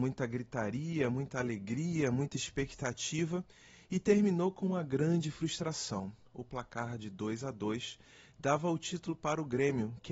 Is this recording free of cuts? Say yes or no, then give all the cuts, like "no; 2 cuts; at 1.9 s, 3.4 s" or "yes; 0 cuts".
yes; 0 cuts